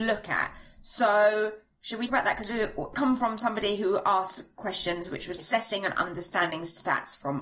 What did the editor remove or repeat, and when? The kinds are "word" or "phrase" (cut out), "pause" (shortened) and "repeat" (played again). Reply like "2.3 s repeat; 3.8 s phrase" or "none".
2.1 s word; 2.9 s phrase; 5.4 s word